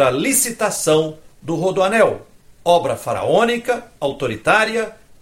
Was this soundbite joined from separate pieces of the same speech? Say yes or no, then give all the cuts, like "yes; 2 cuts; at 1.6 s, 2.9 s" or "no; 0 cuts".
no; 0 cuts